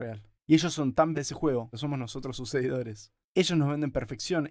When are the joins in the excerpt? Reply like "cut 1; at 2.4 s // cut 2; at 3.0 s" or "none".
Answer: cut 1; at 1.1 s // cut 2; at 1.7 s // cut 3; at 3.2 s

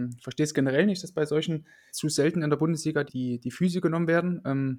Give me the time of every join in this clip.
cut 1; at 1.9 s // cut 2; at 3.1 s

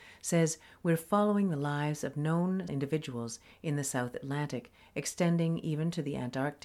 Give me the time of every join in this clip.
cut 1; at 2.7 s

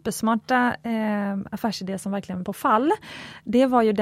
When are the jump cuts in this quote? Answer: cut 1; at 2.4 s

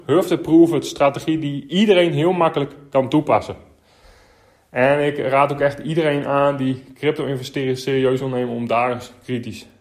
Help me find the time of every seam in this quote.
none

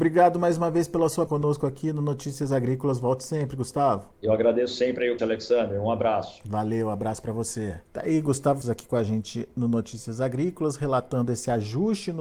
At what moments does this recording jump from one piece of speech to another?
cut 1; at 1.3 s // cut 2; at 4.1 s // cut 3; at 5.2 s // cut 4; at 7.8 s // cut 5; at 8.6 s

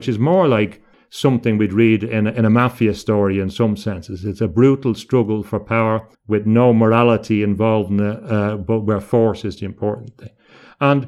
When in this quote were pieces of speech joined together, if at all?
cut 1; at 0.9 s // cut 2; at 6.1 s

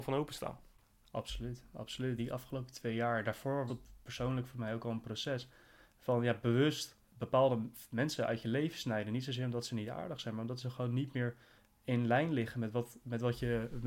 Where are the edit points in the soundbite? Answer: cut 1; at 2.2 s // cut 2; at 3.7 s // cut 3; at 7.1 s

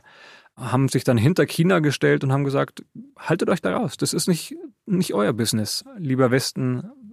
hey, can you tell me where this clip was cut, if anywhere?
cut 1; at 3.1 s

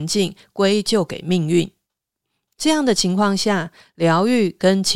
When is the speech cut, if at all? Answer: none

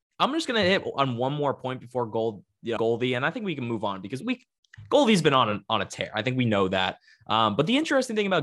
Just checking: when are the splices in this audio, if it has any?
cut 1; at 2.8 s // cut 2; at 4.2 s

